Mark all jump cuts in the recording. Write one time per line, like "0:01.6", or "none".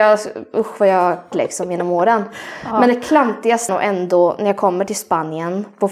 0:01.3
0:03.7

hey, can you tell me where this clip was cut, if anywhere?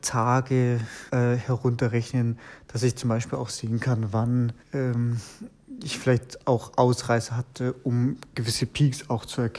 0:01.1
0:04.6

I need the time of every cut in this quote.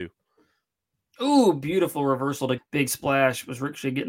0:02.6

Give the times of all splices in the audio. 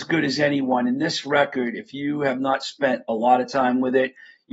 none

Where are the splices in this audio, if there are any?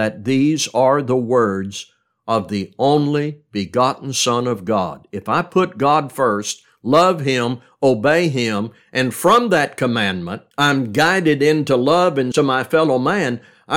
0:10.5
0:12.3

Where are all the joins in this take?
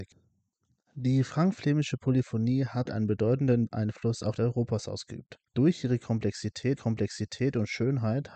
0:02.9
0:04.4
0:05.5
0:06.8

